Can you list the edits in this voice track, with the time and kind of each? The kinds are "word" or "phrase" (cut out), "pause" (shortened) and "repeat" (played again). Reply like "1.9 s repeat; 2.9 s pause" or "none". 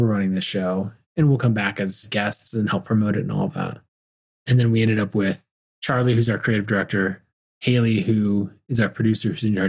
none